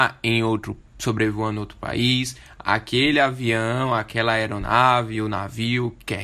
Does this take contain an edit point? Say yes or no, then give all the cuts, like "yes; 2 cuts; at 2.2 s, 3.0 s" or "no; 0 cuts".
no; 0 cuts